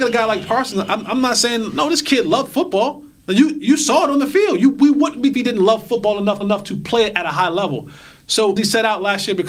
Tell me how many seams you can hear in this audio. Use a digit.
3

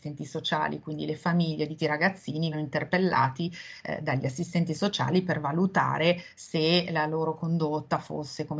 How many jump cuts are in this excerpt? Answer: 2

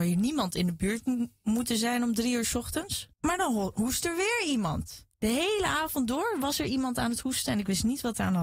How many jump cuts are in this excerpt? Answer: 2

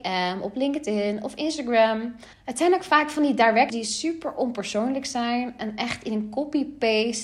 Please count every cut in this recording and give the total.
2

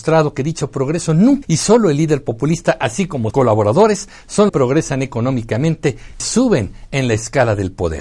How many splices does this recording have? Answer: 4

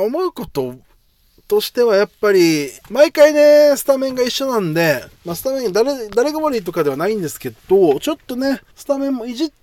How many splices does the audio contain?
3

